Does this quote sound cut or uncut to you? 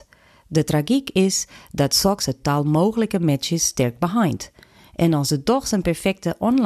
uncut